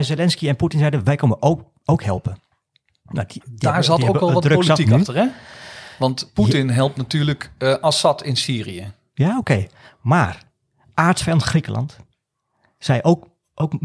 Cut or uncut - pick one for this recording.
uncut